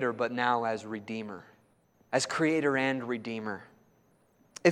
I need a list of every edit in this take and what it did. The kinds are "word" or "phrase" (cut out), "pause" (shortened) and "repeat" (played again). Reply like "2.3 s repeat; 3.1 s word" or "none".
none